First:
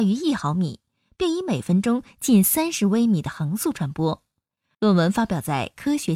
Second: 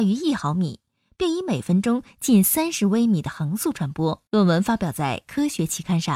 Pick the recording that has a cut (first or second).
second